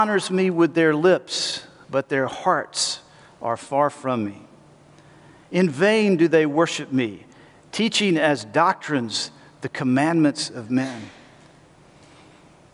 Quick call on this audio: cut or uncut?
uncut